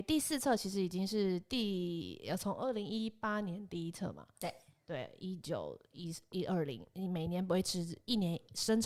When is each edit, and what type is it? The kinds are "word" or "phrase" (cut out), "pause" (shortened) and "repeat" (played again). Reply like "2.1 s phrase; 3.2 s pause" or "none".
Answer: none